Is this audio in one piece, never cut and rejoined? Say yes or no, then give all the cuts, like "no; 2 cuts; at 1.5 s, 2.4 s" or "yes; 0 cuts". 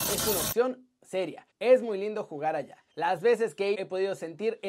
no; 3 cuts; at 1.5 s, 2.9 s, 3.7 s